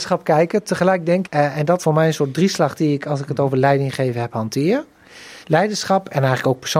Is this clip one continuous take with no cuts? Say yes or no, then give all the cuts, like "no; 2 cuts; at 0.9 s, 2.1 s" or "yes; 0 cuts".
no; 3 cuts; at 1.2 s, 1.8 s, 5.4 s